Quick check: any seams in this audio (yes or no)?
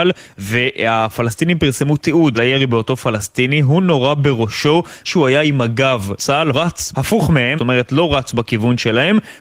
yes